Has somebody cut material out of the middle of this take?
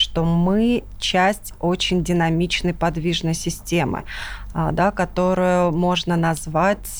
no; 0 cuts

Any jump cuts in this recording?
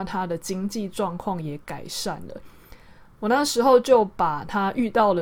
no; 0 cuts

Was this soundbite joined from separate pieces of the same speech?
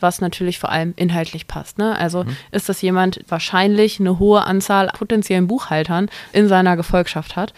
yes; 3 cuts; at 3.2 s, 4.9 s, 6.3 s

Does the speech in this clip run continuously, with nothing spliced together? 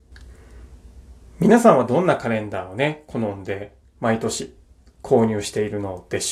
yes; 0 cuts

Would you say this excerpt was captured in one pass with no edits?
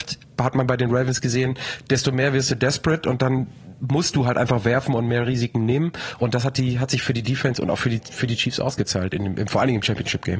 yes; 0 cuts

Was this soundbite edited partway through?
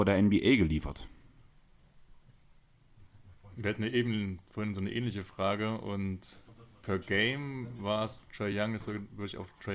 no; 0 cuts

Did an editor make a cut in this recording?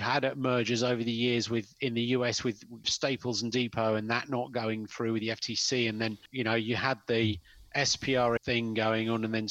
yes; 2 cuts; at 2.8 s, 8.4 s

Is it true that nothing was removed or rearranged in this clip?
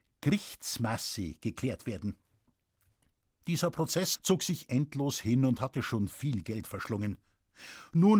yes; 0 cuts

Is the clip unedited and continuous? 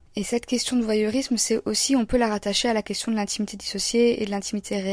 yes; 0 cuts

